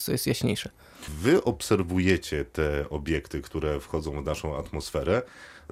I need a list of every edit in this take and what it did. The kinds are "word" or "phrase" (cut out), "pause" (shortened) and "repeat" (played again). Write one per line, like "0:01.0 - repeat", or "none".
none